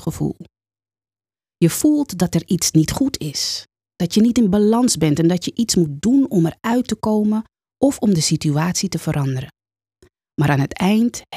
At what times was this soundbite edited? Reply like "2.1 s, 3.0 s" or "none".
none